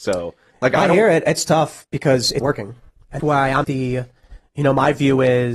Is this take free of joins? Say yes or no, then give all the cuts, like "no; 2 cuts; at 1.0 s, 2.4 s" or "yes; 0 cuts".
no; 3 cuts; at 2.4 s, 3.2 s, 3.6 s